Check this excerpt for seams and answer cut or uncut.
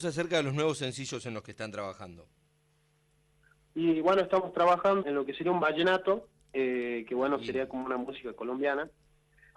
cut